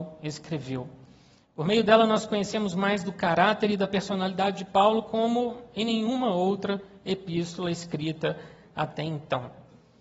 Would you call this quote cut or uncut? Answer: uncut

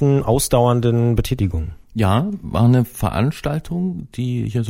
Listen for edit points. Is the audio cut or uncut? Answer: uncut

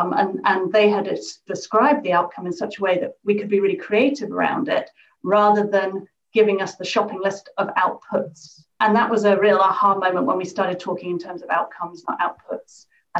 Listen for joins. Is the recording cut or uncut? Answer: cut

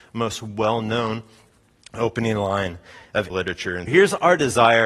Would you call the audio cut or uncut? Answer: cut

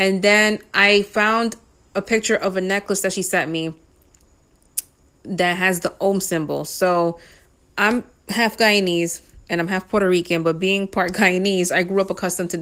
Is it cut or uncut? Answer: uncut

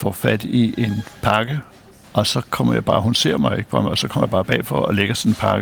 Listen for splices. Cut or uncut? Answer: uncut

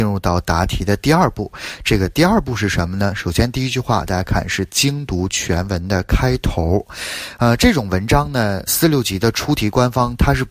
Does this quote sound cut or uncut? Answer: cut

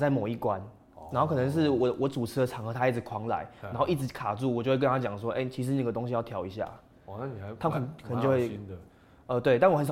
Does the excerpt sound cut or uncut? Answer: uncut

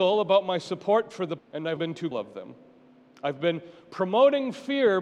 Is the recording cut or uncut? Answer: cut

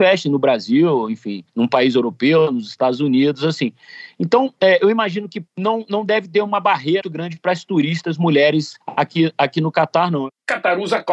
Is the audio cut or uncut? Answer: cut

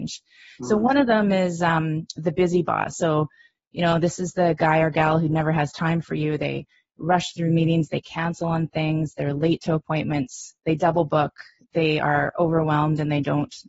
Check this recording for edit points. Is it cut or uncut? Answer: uncut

